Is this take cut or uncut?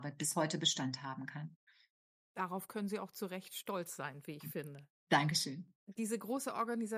uncut